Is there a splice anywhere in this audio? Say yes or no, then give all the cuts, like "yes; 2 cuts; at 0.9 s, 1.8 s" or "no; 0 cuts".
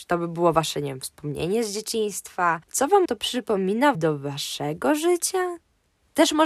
yes; 3 cuts; at 2.6 s, 3.0 s, 3.9 s